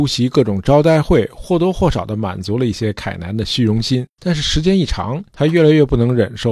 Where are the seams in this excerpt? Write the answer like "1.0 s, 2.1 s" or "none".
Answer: 4.1 s